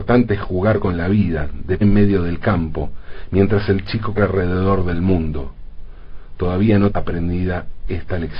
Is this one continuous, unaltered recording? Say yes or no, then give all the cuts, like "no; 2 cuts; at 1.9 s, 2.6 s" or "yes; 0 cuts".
no; 3 cuts; at 1.8 s, 4.2 s, 6.9 s